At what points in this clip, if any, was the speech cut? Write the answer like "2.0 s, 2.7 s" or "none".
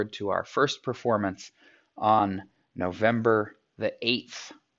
none

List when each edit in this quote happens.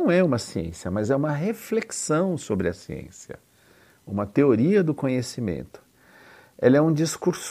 none

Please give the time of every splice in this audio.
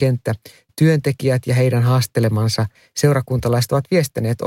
2.7 s

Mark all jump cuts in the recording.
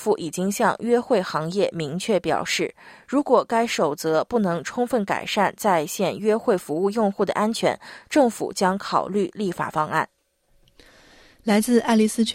none

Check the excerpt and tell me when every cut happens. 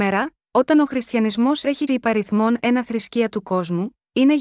1.9 s

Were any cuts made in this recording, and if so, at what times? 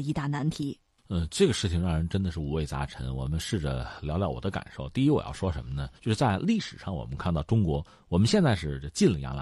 5.9 s

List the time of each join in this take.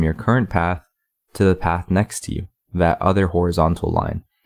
none

